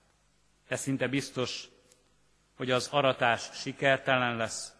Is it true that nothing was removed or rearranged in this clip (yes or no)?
yes